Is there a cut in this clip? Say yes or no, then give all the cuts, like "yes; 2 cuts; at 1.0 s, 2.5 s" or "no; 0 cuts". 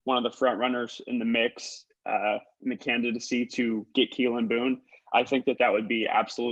no; 0 cuts